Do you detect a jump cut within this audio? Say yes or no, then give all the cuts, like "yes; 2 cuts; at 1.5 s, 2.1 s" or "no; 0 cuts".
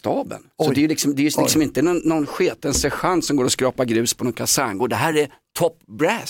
no; 0 cuts